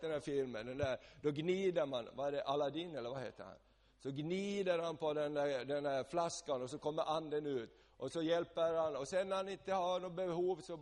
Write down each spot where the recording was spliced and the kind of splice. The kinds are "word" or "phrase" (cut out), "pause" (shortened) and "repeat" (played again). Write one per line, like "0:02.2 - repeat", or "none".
none